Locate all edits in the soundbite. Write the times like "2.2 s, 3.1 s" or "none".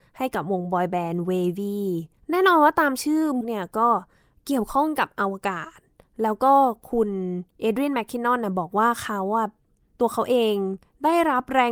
2.2 s, 3.4 s